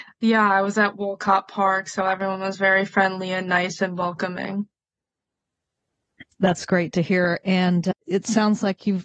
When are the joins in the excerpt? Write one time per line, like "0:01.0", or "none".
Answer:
0:06.3
0:08.0